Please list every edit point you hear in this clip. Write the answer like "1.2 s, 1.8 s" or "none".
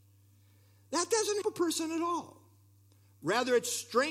1.4 s